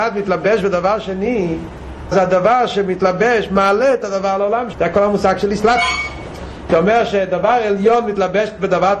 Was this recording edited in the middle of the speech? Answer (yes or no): yes